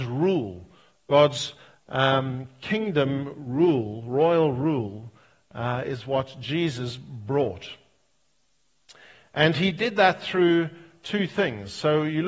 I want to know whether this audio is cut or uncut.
uncut